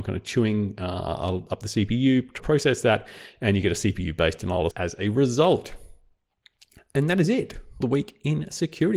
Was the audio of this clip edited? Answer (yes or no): yes